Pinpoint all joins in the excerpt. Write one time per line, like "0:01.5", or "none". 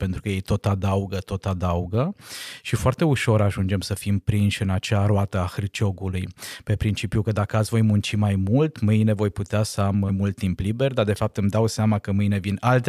0:10.1